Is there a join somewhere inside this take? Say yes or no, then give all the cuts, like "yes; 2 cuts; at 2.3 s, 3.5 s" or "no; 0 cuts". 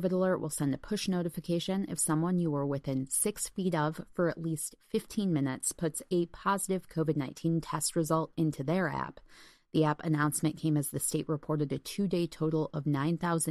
no; 0 cuts